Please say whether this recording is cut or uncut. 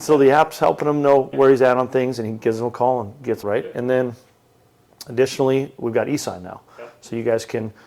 cut